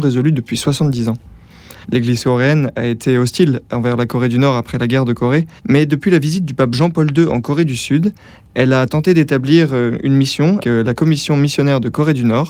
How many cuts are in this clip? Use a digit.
3